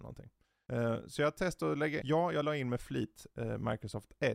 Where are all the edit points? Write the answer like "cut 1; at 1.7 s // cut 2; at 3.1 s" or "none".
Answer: cut 1; at 2.0 s